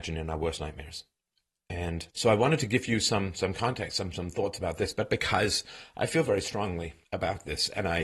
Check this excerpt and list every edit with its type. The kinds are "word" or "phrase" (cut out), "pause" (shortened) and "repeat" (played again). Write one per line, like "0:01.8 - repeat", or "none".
0:02.1 - pause
0:07.0 - pause